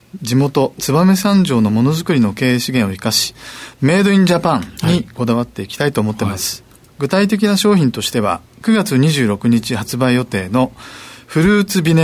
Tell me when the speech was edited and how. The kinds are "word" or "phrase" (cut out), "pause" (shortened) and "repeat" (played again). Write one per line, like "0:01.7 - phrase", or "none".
0:06.9 - pause